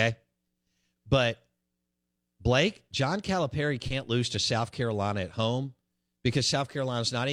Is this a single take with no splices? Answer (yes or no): yes